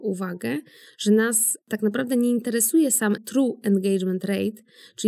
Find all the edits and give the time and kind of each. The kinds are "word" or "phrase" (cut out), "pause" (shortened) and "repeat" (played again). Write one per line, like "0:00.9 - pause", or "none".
0:01.6 - pause
0:03.2 - phrase